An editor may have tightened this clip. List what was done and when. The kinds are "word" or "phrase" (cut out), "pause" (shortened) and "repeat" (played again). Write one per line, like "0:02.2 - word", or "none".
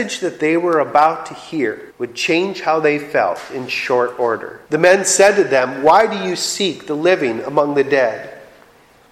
0:01.9 - pause
0:04.7 - pause